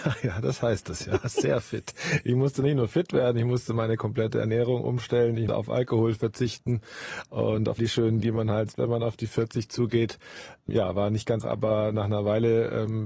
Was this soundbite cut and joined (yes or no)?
yes